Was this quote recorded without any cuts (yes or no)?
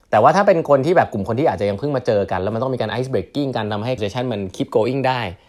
no